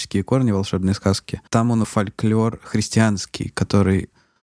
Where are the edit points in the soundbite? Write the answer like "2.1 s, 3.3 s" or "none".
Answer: 1.5 s, 1.8 s